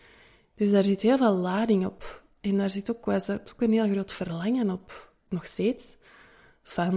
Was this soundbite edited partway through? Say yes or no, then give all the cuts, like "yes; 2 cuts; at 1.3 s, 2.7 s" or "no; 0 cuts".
no; 0 cuts